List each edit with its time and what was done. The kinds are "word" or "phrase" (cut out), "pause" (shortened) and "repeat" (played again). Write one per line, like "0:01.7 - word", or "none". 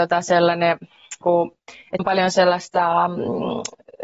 0:01.2 - word
0:02.0 - word